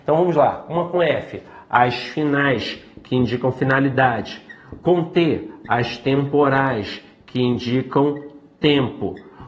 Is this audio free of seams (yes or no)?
yes